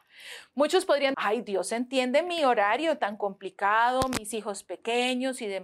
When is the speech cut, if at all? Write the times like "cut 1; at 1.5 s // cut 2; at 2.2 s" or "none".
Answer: cut 1; at 1.1 s